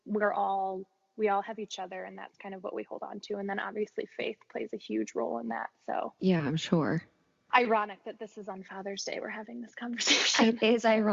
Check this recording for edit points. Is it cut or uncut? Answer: uncut